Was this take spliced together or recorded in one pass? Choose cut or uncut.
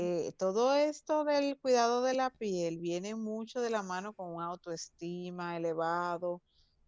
uncut